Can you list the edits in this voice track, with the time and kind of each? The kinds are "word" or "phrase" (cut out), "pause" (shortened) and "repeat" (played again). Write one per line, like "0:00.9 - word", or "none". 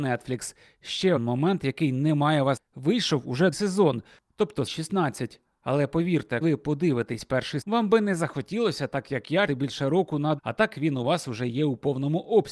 0:01.2 - word
0:02.6 - word
0:03.5 - word
0:04.7 - word
0:06.4 - word
0:07.6 - word
0:09.5 - word
0:10.4 - word